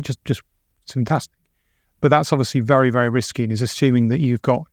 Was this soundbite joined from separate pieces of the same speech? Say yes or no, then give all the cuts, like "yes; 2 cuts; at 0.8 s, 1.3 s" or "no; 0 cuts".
no; 0 cuts